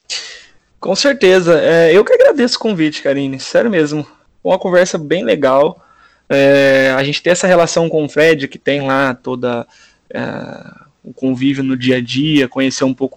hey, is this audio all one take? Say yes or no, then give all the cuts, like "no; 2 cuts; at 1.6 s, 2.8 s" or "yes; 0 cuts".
yes; 0 cuts